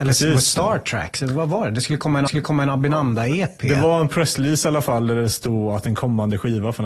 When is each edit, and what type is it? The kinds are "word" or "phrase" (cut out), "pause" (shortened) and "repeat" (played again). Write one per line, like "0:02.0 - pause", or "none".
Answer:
0:02.3 - repeat

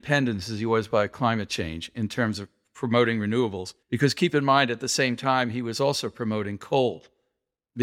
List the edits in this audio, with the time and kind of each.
0:03.8 - pause

